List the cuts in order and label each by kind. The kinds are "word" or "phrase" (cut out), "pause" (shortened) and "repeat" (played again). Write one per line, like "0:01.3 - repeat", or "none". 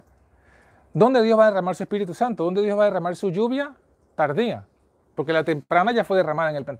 none